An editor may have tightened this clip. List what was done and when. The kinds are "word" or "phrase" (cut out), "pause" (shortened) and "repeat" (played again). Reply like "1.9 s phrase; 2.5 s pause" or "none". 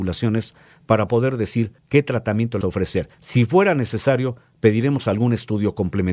1.8 s pause; 2.6 s word; 3.1 s pause